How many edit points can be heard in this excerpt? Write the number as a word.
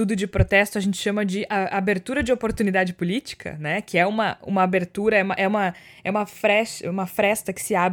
zero